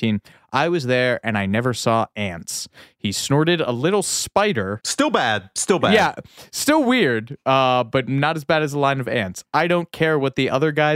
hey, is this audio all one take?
yes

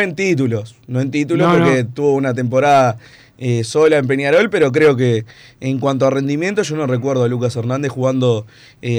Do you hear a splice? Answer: no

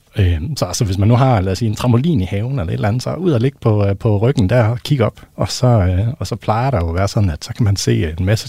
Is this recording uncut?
no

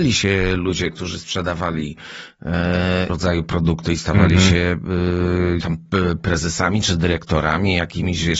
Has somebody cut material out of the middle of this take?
yes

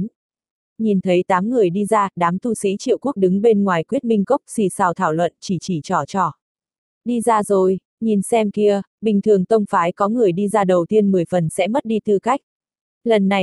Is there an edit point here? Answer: no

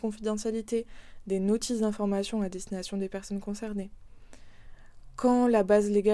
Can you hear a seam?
no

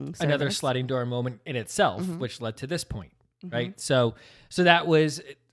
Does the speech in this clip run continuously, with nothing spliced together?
yes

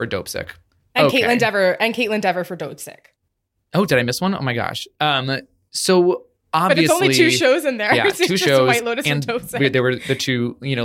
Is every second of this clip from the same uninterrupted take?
yes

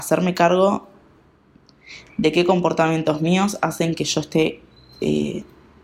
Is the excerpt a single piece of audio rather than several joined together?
yes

